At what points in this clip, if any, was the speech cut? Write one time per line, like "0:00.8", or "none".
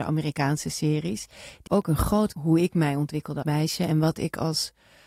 0:01.7
0:02.3
0:03.4